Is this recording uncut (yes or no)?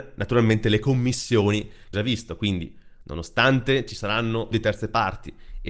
no